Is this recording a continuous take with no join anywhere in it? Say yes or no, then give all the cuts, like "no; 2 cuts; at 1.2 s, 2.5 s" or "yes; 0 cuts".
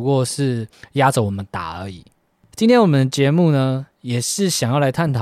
yes; 0 cuts